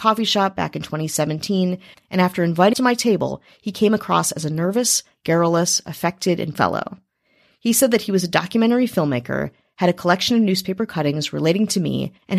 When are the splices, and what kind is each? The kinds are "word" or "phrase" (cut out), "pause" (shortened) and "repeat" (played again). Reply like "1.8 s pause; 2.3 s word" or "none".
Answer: 2.7 s word; 6.5 s word